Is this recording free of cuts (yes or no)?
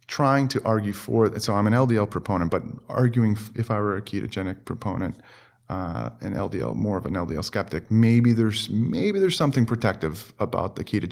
yes